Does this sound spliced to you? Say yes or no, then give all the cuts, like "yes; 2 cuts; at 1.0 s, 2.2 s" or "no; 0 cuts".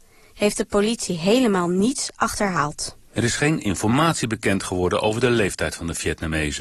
yes; 1 cut; at 3.0 s